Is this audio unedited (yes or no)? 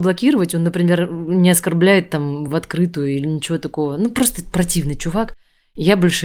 yes